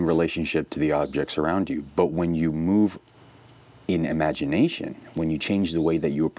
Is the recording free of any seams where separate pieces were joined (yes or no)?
yes